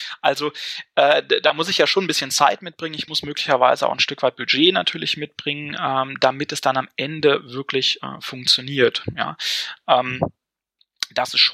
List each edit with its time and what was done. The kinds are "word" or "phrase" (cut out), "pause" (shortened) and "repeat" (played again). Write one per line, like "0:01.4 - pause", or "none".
none